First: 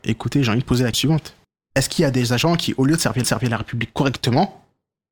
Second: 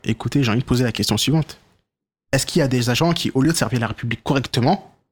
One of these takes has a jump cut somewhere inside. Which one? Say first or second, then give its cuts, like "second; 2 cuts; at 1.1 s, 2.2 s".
first; 3 cuts; at 0.9 s, 1.4 s, 3.2 s